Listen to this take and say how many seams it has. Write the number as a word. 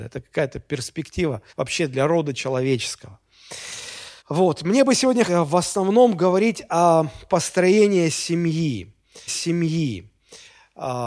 five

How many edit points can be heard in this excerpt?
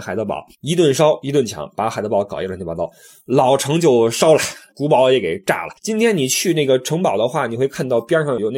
one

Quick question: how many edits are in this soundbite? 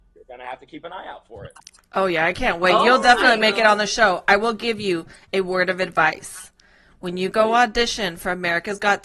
zero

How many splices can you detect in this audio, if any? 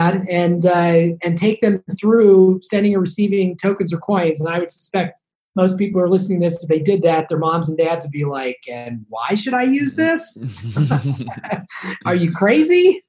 zero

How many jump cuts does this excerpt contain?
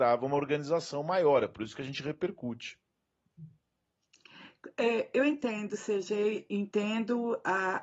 one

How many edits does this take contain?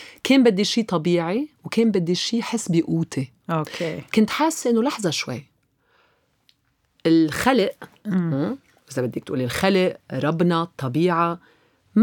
one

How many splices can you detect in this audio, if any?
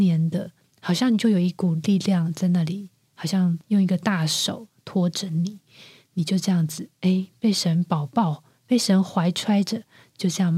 zero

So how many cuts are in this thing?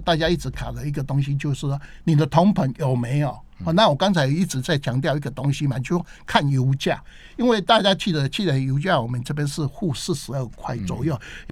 zero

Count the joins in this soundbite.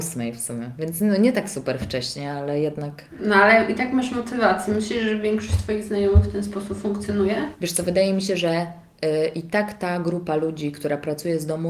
zero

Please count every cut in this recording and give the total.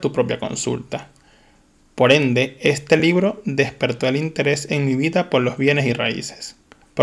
zero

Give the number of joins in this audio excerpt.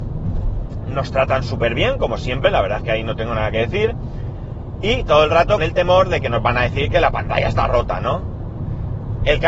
one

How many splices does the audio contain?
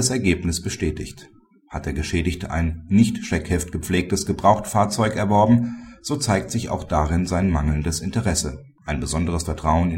zero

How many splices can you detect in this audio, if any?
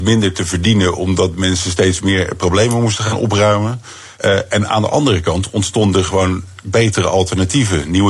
one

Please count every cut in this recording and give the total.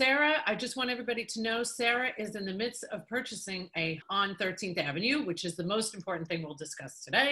one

